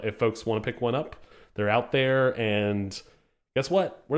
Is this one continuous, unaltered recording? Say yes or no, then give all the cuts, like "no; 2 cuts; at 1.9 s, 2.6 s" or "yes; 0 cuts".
yes; 0 cuts